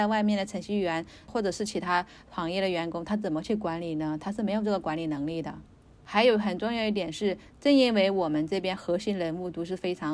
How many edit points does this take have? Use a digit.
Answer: 0